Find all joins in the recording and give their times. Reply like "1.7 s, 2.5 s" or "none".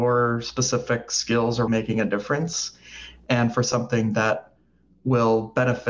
1.7 s